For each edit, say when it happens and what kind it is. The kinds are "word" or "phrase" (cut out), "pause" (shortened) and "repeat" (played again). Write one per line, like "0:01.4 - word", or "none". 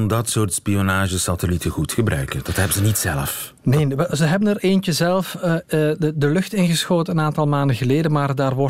none